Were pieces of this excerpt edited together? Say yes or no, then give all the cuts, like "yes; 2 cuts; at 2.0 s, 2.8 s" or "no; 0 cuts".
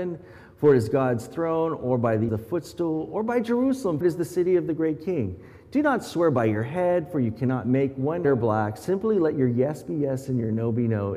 yes; 3 cuts; at 2.3 s, 4.0 s, 8.2 s